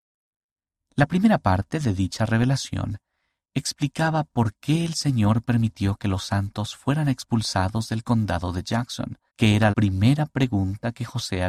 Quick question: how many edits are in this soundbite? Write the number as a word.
two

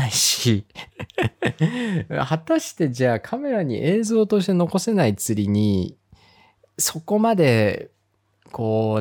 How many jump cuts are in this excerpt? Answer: zero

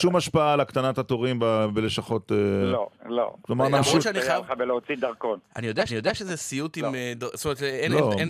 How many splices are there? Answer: two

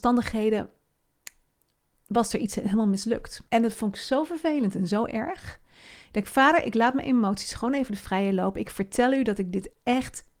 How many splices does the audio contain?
one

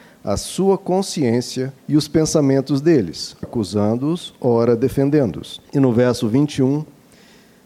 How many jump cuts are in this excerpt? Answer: three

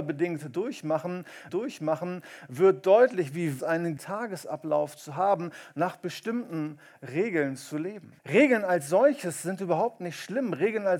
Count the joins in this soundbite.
four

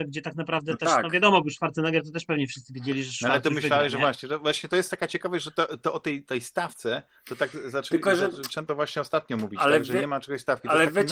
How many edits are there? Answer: zero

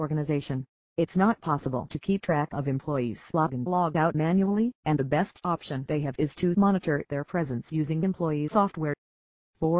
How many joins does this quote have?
two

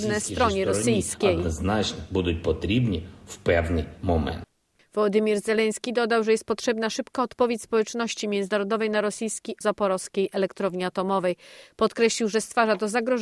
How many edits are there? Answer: one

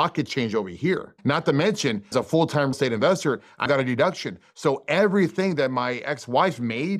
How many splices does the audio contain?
three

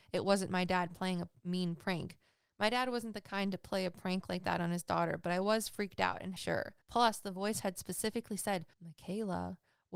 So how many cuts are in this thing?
three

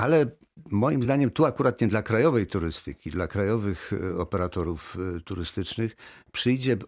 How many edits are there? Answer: zero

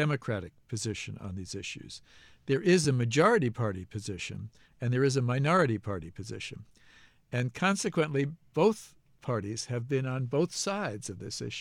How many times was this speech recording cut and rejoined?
zero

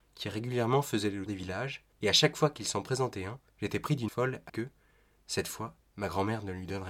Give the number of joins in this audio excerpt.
six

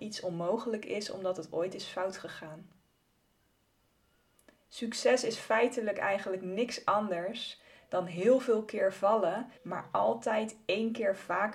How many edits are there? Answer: one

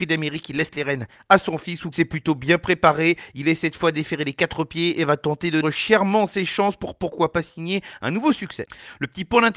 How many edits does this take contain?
two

